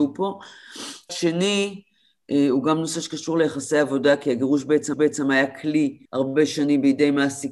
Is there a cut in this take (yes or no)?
yes